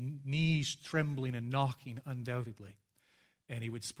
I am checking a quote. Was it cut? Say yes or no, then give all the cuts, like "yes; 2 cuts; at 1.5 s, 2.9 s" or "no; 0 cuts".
no; 0 cuts